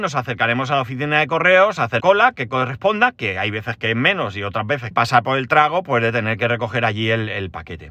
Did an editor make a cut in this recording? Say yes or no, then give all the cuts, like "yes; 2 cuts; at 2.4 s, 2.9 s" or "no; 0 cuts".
yes; 2 cuts; at 2.0 s, 4.9 s